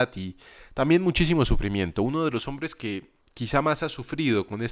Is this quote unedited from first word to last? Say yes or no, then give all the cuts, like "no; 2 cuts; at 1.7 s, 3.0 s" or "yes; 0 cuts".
no; 1 cut; at 3.2 s